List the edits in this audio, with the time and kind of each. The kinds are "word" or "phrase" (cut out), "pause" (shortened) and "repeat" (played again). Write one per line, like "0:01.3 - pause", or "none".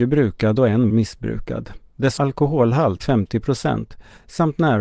0:00.9 - word
0:02.2 - word
0:03.0 - word